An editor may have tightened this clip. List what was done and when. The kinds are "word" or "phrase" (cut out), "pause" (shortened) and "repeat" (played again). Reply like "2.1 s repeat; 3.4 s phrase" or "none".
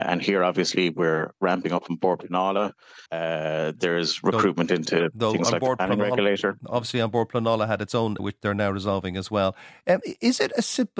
3.1 s pause; 8.2 s phrase